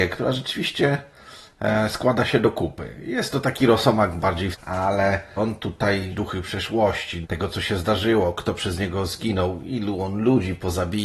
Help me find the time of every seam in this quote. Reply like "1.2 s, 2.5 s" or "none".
4.5 s, 5.4 s, 6.1 s, 7.2 s